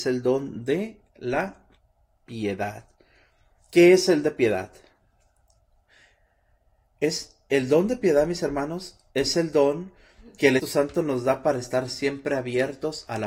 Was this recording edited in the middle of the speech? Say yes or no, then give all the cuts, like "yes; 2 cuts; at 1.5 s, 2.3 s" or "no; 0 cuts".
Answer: yes; 2 cuts; at 4.2 s, 10.6 s